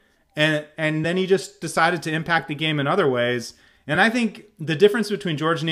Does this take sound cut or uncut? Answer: uncut